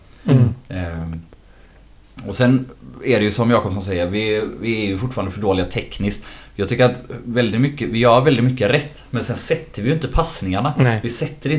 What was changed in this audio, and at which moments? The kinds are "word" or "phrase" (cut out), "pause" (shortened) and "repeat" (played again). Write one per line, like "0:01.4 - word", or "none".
none